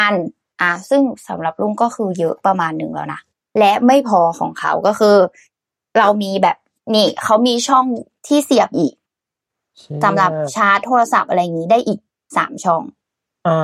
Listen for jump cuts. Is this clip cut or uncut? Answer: cut